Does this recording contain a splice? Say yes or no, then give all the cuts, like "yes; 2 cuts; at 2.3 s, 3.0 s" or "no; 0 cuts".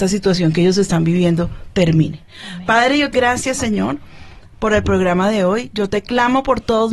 yes; 1 cut; at 3.1 s